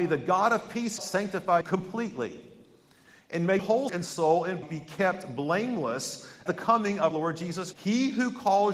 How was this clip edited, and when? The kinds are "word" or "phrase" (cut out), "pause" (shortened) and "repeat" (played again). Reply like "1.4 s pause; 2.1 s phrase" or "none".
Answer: 1.0 s word; 1.6 s word; 3.6 s word; 3.9 s word; 4.6 s word; 6.5 s word; 7.1 s word; 7.7 s word

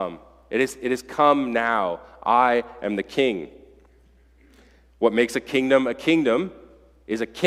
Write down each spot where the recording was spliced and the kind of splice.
none

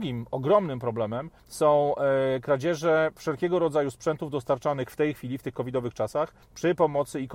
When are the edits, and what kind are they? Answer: 1.4 s pause; 6.4 s pause

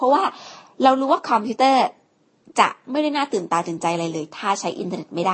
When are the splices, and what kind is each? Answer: none

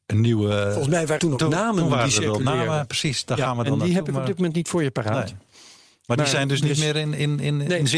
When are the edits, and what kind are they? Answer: 1.2 s word

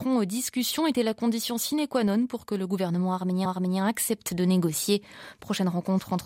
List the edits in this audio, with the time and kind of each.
3.5 s repeat

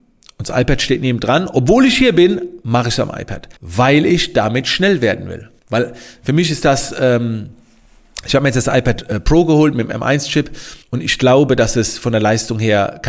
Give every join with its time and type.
3.6 s pause; 5.6 s pause; 10.8 s pause

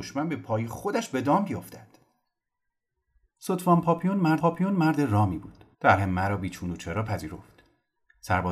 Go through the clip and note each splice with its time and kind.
4.4 s repeat; 5.7 s pause

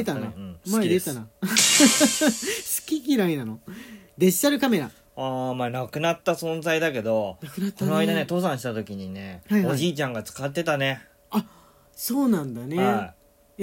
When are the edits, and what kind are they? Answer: none

